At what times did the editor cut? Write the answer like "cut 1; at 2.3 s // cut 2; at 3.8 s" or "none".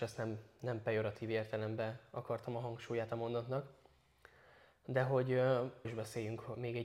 cut 1; at 5.8 s